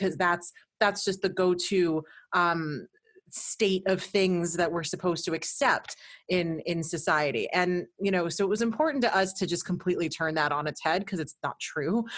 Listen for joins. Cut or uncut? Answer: uncut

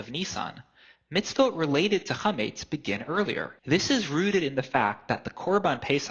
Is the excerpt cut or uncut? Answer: cut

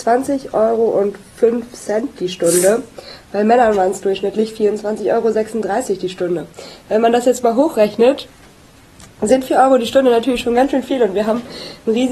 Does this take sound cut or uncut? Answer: uncut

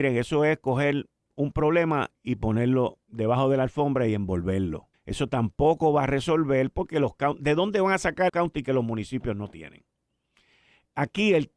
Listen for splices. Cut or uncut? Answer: cut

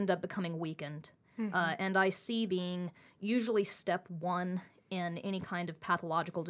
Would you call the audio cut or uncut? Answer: cut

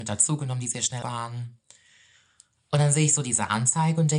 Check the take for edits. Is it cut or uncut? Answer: cut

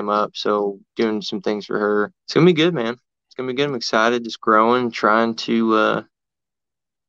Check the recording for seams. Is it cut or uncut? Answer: cut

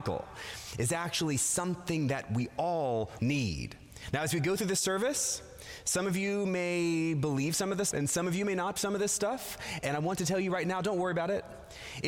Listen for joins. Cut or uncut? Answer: cut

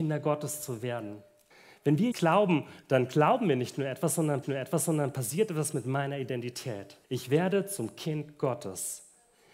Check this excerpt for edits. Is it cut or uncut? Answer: cut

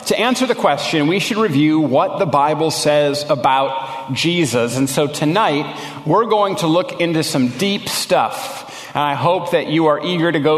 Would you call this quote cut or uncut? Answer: uncut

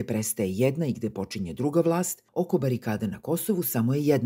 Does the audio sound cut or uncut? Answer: cut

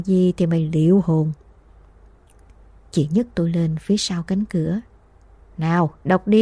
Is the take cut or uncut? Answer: uncut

